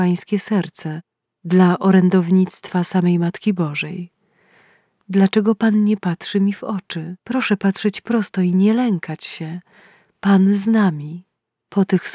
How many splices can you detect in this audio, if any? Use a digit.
1